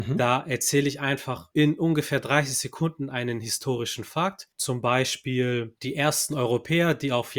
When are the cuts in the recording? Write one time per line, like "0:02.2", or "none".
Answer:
0:04.5